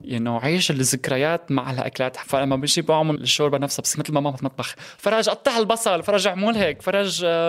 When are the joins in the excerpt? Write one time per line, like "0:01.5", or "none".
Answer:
0:02.2
0:03.2
0:03.9
0:04.4

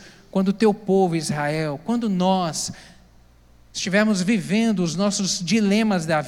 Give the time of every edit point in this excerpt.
none

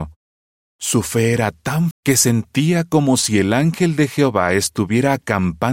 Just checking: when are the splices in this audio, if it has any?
0:01.9

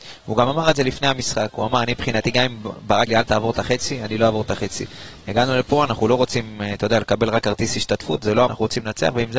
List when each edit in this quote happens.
0:03.1
0:08.5

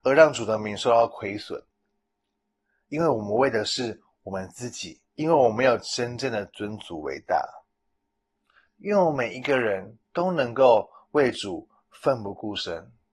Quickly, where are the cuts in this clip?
0:05.1
0:10.0

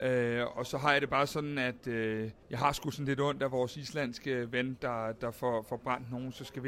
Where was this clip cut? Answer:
0:02.4

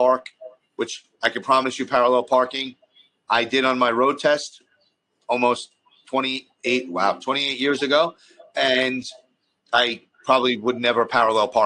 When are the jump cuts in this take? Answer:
none

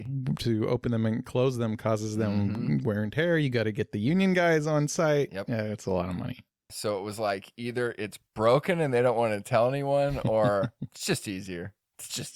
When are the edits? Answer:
none

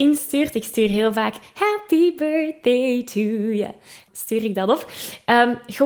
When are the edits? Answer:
0:04.1

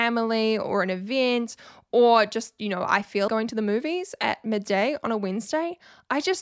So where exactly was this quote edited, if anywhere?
0:03.3

